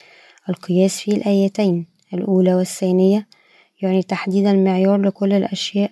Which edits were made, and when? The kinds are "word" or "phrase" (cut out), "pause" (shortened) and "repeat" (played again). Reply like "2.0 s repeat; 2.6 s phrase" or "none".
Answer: none